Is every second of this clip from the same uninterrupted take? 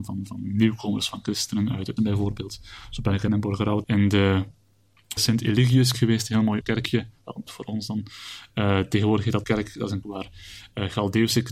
no; 9 cuts; at 2.0 s, 3.3 s, 3.8 s, 5.2 s, 5.9 s, 6.6 s, 7.5 s, 9.4 s, 10.0 s

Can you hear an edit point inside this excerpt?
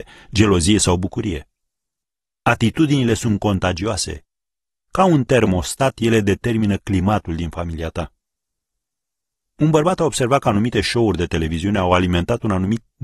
no; 0 cuts

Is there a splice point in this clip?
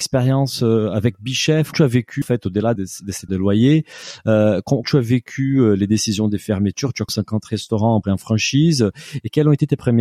yes; 7 cuts; at 1.7 s, 2.2 s, 2.8 s, 3.3 s, 4.8 s, 7.1 s, 8.0 s

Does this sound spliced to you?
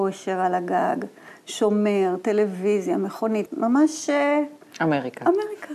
yes; 1 cut; at 3.5 s

